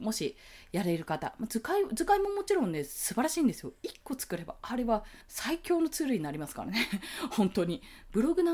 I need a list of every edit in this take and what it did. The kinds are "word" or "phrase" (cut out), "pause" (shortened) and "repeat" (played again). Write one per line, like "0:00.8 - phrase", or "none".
0:05.2 - pause